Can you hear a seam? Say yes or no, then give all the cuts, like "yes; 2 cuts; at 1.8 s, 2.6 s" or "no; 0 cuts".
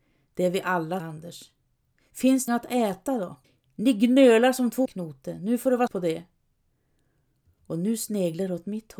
yes; 5 cuts; at 1.0 s, 2.5 s, 3.4 s, 4.8 s, 5.9 s